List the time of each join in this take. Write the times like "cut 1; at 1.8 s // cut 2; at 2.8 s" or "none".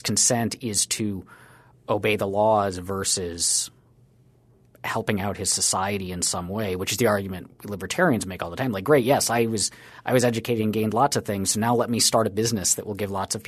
none